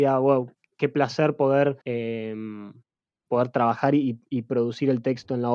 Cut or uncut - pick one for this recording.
cut